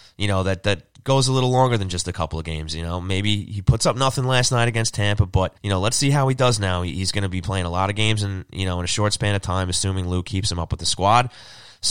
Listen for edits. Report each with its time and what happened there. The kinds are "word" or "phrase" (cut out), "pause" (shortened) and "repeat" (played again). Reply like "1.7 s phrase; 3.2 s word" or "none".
5.6 s pause